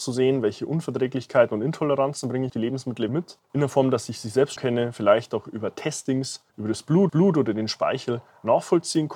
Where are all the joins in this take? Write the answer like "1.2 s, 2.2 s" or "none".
2.5 s, 3.1 s, 3.4 s, 4.6 s, 6.5 s, 7.1 s